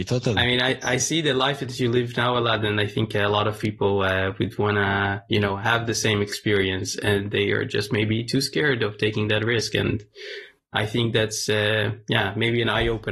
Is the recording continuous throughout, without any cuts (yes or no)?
yes